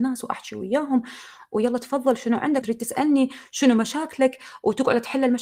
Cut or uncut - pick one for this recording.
cut